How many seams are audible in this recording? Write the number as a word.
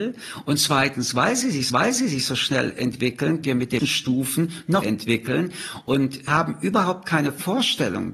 five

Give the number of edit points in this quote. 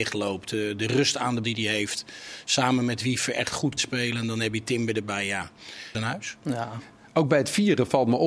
three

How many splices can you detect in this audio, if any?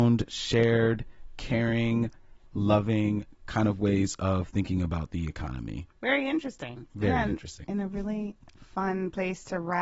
one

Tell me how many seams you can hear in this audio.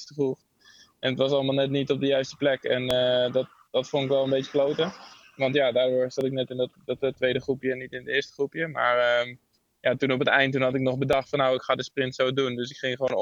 one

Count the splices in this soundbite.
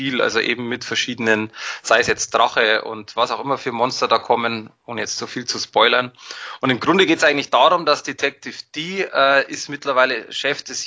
zero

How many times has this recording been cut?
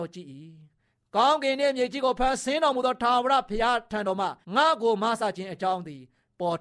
one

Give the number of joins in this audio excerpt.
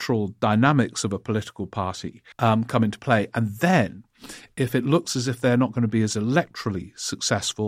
one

